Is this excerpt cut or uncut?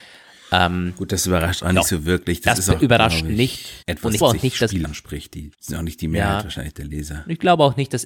cut